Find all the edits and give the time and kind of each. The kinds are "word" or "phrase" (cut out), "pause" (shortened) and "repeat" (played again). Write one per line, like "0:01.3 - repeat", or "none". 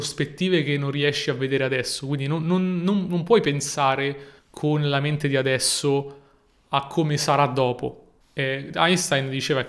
0:04.4 - pause
0:08.2 - pause